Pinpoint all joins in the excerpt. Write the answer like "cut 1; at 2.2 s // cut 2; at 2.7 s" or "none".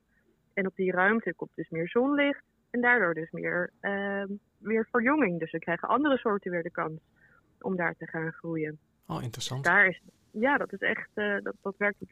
none